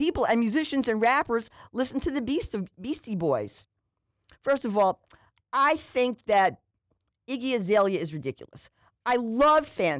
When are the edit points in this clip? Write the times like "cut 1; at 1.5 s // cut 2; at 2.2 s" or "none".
none